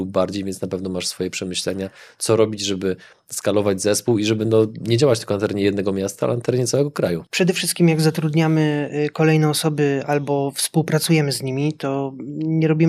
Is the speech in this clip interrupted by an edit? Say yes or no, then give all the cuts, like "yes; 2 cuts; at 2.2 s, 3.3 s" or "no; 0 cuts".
no; 0 cuts